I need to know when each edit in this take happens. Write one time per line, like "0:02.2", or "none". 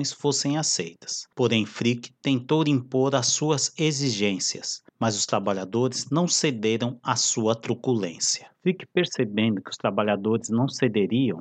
0:01.3
0:04.9
0:08.5